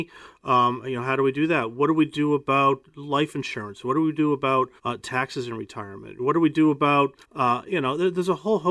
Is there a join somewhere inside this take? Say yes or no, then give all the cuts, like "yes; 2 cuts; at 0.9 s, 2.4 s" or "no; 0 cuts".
yes; 2 cuts; at 4.8 s, 7.2 s